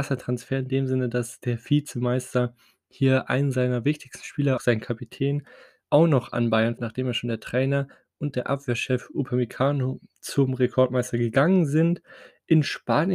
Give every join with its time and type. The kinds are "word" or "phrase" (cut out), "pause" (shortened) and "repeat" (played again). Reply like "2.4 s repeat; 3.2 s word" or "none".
4.6 s word; 6.8 s word